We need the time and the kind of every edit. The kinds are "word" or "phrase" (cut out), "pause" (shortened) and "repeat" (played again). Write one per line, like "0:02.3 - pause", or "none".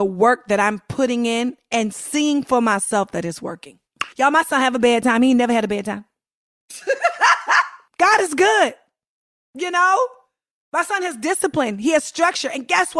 0:04.1 - pause